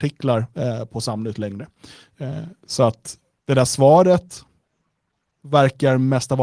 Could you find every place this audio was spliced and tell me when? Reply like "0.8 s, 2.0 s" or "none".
none

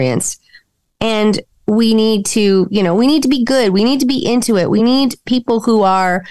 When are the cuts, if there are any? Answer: none

